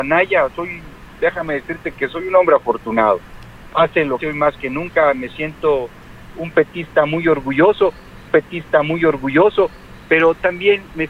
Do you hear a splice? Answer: yes; 2 cuts; at 4.2 s, 8.3 s

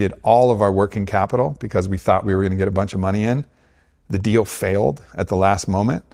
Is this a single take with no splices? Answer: yes; 0 cuts

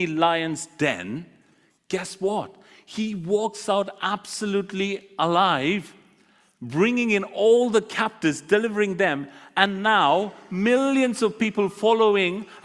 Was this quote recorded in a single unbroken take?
yes; 0 cuts

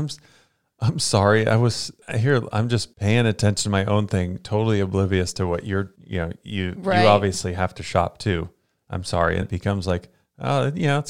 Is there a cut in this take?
yes; 3 cuts; at 2.9 s, 6.0 s, 9.4 s

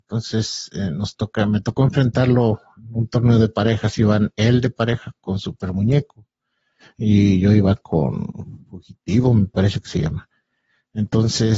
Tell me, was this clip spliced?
no; 0 cuts

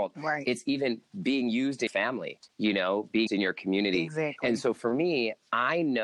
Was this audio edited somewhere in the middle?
yes; 2 cuts; at 1.9 s, 3.3 s

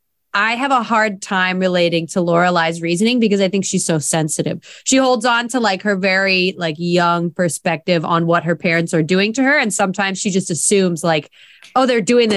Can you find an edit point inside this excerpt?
no; 0 cuts

